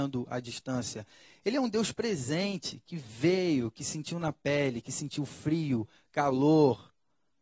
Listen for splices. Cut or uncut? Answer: uncut